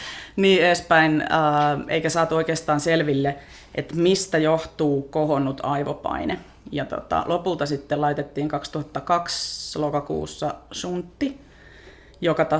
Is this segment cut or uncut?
uncut